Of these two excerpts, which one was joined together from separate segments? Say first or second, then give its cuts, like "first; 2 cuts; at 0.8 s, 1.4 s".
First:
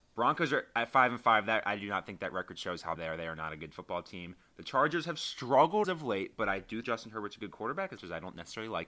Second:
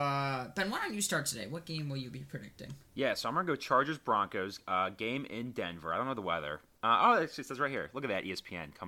first; 4 cuts; at 3.0 s, 5.8 s, 6.8 s, 8.0 s